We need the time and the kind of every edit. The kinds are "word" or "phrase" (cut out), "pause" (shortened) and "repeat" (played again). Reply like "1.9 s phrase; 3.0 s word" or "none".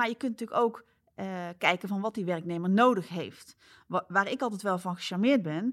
none